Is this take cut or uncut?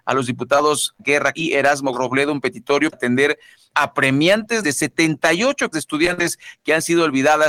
cut